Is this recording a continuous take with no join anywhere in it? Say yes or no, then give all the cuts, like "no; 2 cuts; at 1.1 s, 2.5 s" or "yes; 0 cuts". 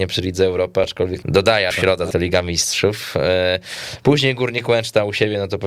no; 3 cuts; at 1.2 s, 1.7 s, 2.1 s